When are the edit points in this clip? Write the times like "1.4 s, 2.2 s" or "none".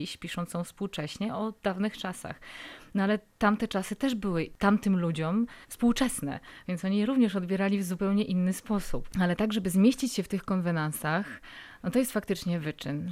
5.6 s